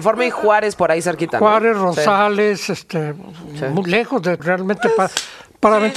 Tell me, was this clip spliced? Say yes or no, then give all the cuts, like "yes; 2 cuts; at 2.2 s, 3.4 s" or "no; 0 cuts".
yes; 1 cut; at 4.4 s